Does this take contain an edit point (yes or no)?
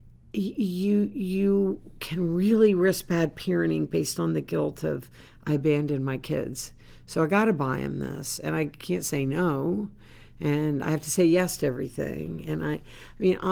no